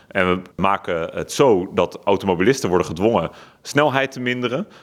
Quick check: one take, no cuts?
yes; 0 cuts

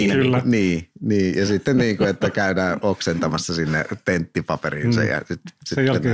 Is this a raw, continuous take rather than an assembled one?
yes; 0 cuts

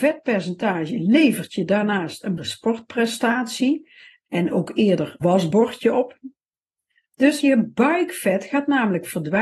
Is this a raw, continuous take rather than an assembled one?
no; 3 cuts; at 2.4 s, 5.2 s, 7.4 s

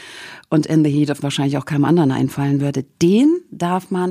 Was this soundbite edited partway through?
yes; 1 cut; at 1.2 s

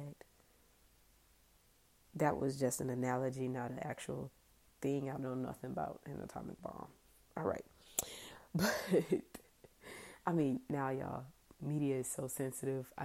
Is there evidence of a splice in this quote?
no; 0 cuts

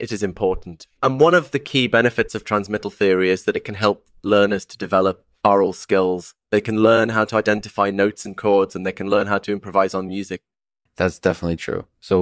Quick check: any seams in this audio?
no; 0 cuts

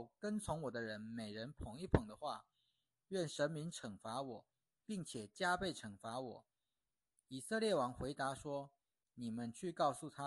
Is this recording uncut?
yes; 0 cuts

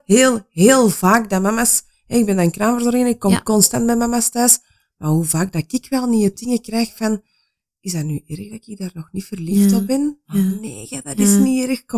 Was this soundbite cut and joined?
no; 0 cuts

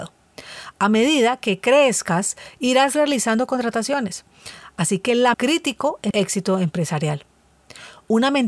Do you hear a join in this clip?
yes; 2 cuts; at 5.3 s, 6.1 s

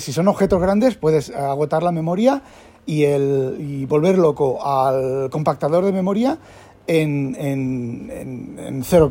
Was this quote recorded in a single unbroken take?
yes; 0 cuts

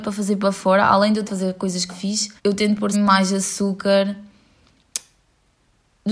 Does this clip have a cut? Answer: yes; 4 cuts; at 1.3 s, 1.9 s, 2.4 s, 2.9 s

